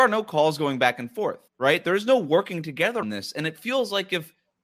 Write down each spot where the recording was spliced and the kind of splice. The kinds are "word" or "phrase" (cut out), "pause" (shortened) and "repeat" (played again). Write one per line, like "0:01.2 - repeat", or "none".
0:01.5 - pause
0:03.0 - word